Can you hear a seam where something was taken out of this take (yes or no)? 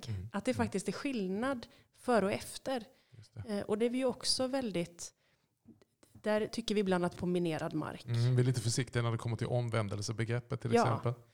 yes